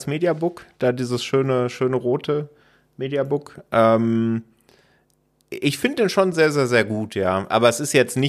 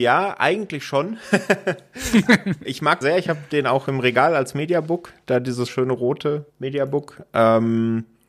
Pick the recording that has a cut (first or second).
second